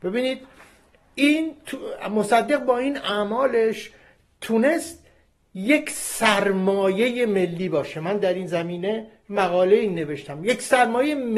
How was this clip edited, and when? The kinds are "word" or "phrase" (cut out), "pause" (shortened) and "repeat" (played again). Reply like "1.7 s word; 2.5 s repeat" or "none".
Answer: none